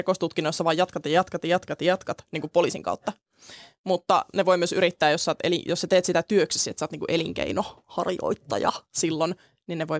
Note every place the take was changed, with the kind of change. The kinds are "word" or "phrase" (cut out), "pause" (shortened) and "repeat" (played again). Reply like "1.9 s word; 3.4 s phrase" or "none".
none